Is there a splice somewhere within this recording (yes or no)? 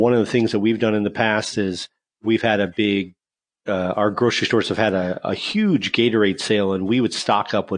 no